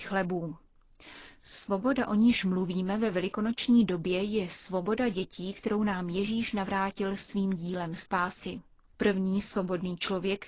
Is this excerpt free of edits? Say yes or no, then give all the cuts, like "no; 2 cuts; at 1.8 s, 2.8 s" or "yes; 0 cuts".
yes; 0 cuts